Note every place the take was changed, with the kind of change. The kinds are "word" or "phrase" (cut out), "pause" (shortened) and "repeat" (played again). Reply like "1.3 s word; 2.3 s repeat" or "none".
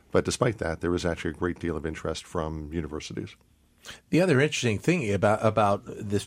none